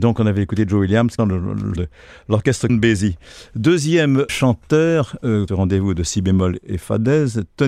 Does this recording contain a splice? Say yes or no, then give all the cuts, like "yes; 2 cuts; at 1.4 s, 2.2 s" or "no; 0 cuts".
yes; 5 cuts; at 1.2 s, 1.8 s, 2.7 s, 4.3 s, 5.5 s